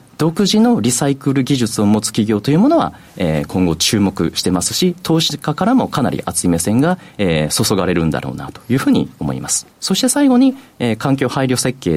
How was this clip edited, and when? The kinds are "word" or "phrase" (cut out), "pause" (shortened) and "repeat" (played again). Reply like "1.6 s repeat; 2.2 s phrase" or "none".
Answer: 9.7 s pause

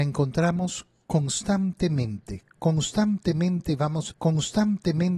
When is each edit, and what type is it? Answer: 4.1 s repeat

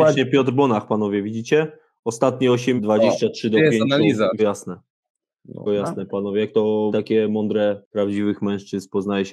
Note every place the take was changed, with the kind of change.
2.8 s word; 4.4 s word; 5.7 s word; 6.9 s word; 7.8 s word

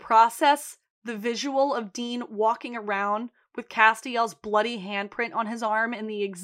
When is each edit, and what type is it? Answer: none

